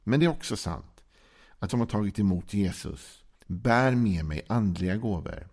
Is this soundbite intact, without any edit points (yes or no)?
no